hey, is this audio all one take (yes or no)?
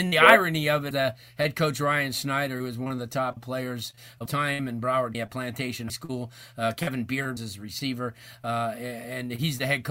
no